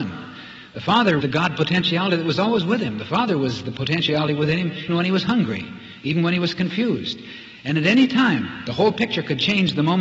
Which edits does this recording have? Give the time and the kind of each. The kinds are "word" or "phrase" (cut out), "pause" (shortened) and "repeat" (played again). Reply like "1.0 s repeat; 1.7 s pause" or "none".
1.2 s word; 4.9 s word